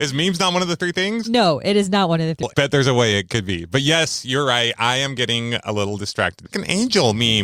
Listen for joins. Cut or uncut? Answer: cut